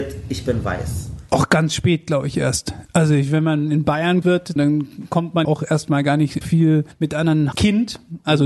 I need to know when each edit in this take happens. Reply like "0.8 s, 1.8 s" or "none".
4.2 s, 4.6 s, 5.4 s, 6.4 s, 7.5 s